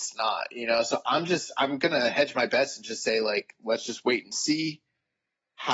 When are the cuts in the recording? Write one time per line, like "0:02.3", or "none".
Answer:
none